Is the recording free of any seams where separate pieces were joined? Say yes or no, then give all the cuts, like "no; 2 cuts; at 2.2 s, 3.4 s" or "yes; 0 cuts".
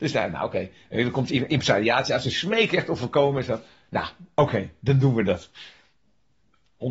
yes; 0 cuts